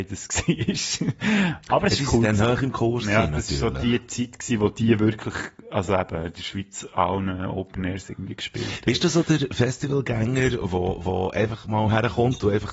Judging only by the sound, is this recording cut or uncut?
uncut